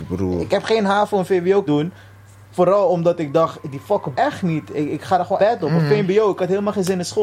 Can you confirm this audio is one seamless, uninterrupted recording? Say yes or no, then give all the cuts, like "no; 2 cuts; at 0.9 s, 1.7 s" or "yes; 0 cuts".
no; 3 cuts; at 1.7 s, 4.1 s, 5.4 s